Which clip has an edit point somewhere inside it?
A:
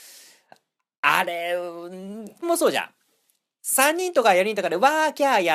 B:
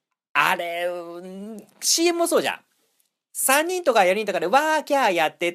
A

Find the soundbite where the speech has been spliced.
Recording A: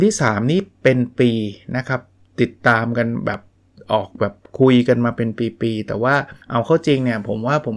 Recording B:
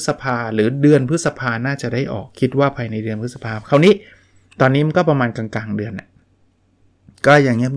A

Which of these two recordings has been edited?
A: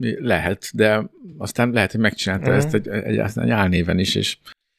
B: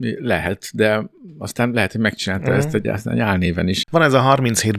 B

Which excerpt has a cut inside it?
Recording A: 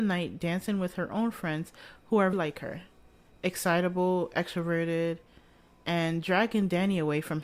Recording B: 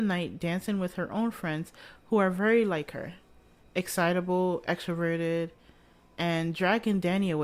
A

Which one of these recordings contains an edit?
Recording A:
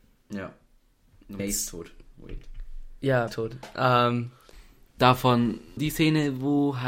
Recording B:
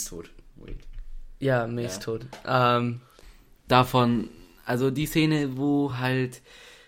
A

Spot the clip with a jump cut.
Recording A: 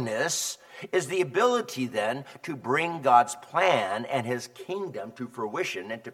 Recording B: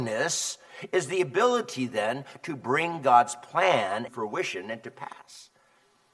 B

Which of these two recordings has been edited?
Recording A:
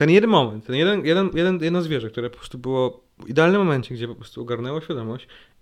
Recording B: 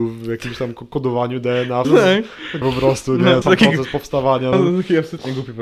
B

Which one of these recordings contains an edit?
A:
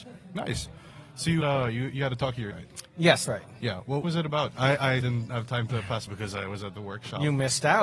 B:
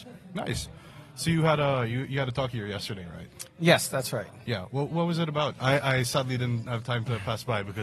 A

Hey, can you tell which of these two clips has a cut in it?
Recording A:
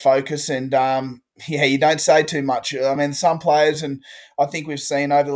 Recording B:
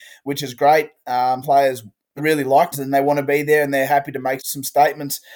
B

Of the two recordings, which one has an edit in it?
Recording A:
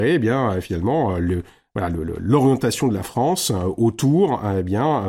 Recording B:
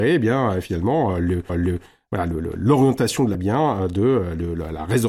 B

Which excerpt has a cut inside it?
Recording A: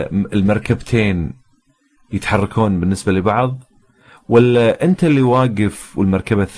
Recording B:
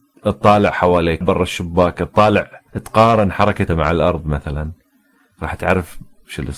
B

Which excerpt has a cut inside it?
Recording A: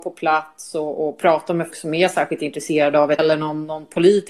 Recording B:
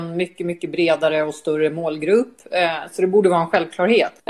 A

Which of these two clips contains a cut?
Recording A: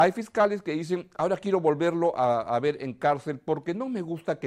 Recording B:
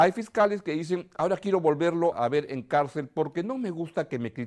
B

